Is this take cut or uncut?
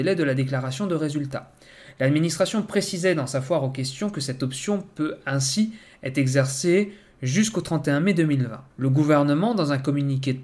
cut